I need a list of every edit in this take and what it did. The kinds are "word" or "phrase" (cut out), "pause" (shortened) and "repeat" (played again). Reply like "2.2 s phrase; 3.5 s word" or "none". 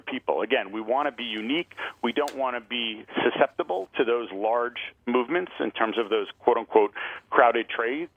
none